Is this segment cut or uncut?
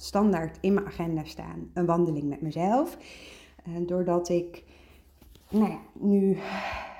uncut